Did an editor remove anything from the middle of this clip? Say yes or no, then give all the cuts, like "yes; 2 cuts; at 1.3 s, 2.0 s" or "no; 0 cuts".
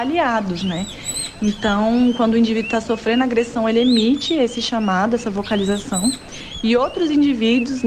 no; 0 cuts